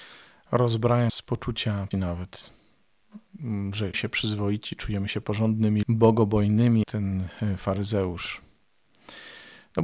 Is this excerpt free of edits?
no; 5 cuts; at 1.1 s, 1.9 s, 3.9 s, 5.8 s, 6.8 s

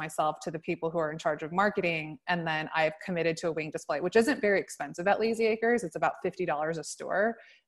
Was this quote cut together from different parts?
no; 0 cuts

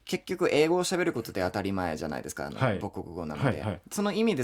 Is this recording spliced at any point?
no; 0 cuts

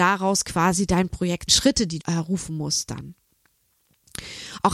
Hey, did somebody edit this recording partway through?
yes; 2 cuts; at 1.5 s, 2.0 s

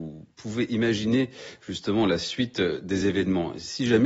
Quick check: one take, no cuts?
yes; 0 cuts

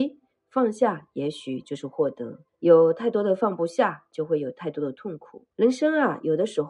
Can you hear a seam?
yes; 2 cuts; at 2.5 s, 5.5 s

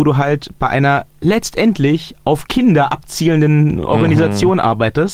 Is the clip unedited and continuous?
yes; 0 cuts

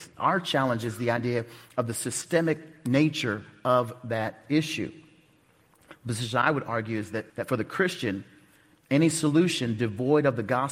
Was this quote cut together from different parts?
yes; 1 cut; at 7.3 s

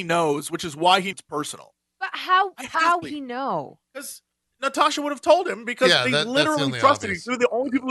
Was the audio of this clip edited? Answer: yes; 4 cuts; at 1.1 s, 1.8 s, 3.0 s, 3.8 s

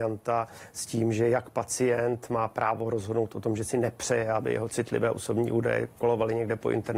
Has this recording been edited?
no; 0 cuts

